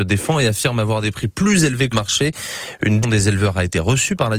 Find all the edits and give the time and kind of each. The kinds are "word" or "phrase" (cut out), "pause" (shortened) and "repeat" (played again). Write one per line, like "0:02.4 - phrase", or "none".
0:01.9 - word
0:03.0 - word